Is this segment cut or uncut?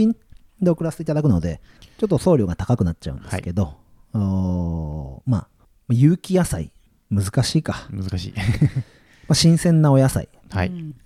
uncut